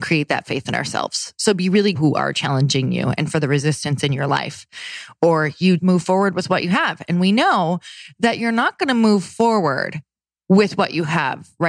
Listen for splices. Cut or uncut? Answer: cut